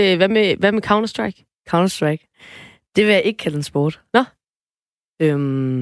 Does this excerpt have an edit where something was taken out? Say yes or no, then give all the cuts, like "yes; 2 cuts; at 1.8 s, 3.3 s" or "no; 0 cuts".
no; 0 cuts